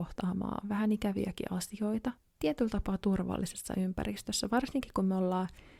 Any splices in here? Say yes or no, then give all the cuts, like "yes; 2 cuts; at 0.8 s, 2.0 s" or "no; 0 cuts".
no; 0 cuts